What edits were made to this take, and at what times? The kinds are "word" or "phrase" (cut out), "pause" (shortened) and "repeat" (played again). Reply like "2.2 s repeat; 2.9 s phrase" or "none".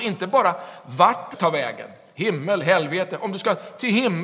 1.3 s word